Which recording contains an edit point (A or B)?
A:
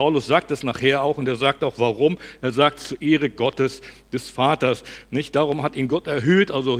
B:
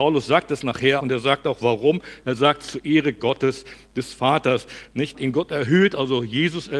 B